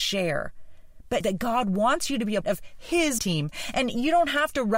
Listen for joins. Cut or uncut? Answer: cut